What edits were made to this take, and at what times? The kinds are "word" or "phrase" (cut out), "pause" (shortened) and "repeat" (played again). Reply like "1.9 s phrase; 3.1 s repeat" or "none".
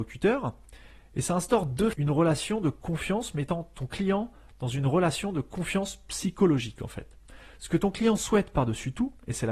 1.9 s word

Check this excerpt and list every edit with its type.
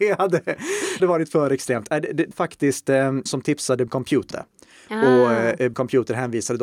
1.0 s word; 2.3 s word; 3.3 s word; 3.9 s word; 4.3 s word; 5.7 s word

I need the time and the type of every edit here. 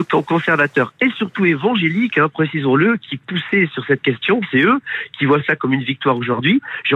none

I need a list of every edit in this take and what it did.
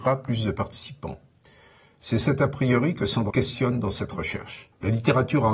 3.3 s word

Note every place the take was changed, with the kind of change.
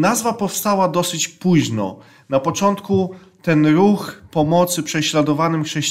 none

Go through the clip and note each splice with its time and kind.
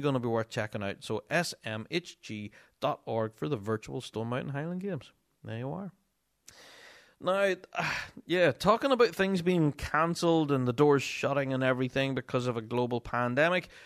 none

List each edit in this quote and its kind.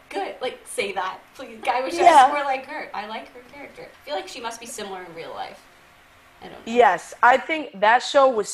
1.6 s word; 3.9 s pause

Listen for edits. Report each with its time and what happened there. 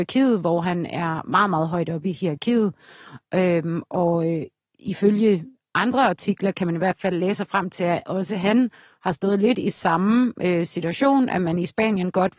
4.6 s pause

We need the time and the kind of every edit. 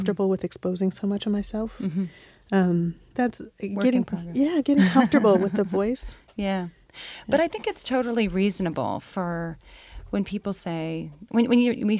3.1 s word

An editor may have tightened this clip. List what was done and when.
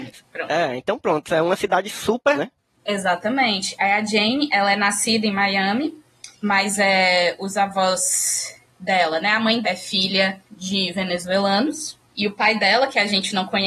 2.4 s word; 6.3 s pause; 8.7 s pause; 9.6 s word; 10.5 s pause; 12.0 s pause

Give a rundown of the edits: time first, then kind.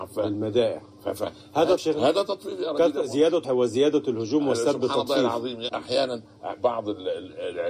1.8 s word; 3.4 s word; 5.7 s word

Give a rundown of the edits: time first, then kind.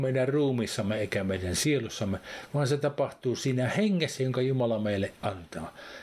none

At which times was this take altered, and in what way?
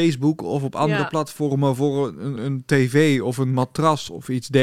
2.4 s word

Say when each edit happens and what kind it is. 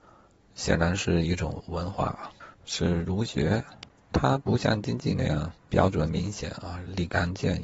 2.5 s pause; 4.1 s word; 5.6 s pause

